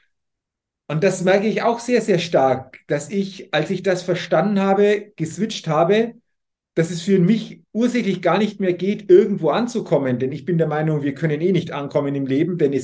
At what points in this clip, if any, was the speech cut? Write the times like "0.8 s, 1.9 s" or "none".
none